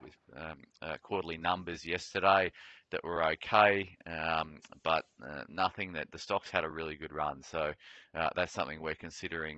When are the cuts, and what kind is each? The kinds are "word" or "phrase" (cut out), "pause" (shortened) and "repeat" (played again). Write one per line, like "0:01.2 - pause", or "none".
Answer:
none